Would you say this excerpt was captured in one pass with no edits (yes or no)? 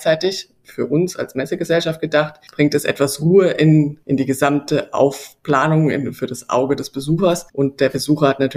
no